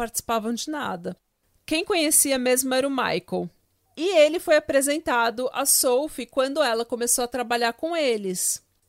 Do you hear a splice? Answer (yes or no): no